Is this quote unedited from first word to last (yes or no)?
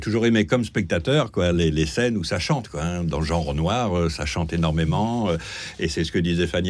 yes